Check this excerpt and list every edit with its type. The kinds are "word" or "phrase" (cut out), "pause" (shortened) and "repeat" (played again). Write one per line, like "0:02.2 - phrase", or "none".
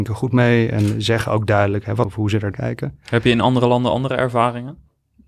0:02.0 - phrase
0:02.5 - word